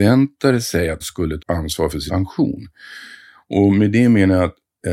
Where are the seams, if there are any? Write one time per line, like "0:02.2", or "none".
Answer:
0:01.0
0:01.4
0:02.1